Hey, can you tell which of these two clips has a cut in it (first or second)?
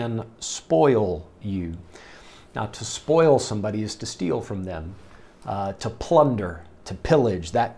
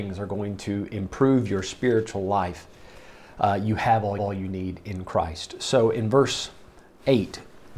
second